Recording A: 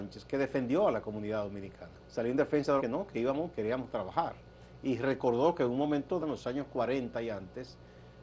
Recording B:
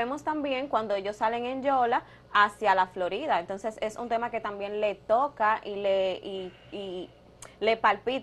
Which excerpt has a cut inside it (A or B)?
A